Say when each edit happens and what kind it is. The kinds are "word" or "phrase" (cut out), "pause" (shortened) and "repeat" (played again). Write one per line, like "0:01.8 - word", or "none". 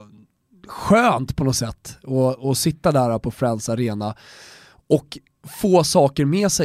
none

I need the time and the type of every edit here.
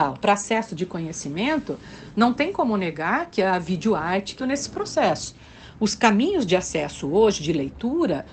0:04.4 - phrase

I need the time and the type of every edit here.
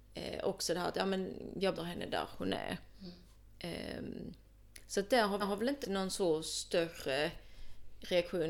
0:01.7 - word
0:05.4 - repeat
0:05.8 - word

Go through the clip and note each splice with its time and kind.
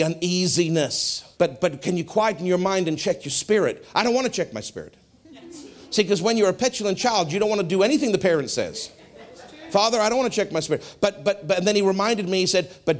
0:01.3 - pause

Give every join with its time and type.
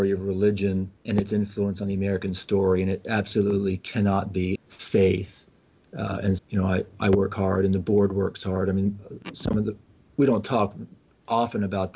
0:01.0 - pause
0:04.6 - phrase
0:06.4 - word

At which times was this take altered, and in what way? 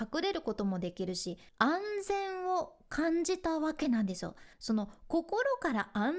0:01.5 - pause
0:04.5 - pause

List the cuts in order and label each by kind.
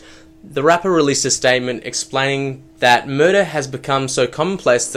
0:02.7 - pause

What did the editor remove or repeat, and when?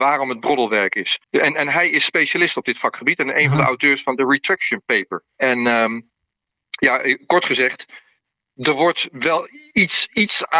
0:01.2 - pause
0:05.3 - pause

